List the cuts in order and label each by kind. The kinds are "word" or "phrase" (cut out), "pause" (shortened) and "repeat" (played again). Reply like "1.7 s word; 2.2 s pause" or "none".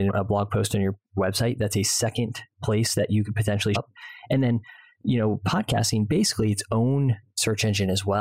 3.7 s word